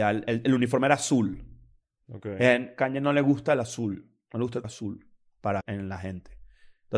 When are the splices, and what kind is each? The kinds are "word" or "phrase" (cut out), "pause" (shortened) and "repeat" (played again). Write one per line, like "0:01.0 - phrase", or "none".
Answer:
0:04.6 - word
0:05.6 - word